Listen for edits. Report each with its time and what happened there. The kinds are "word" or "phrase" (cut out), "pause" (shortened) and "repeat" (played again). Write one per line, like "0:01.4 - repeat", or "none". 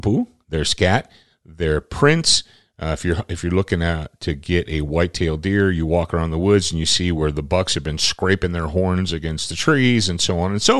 none